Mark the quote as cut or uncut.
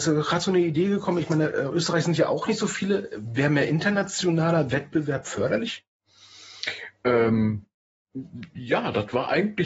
uncut